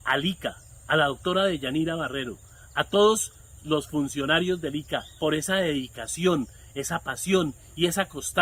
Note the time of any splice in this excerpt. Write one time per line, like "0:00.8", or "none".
none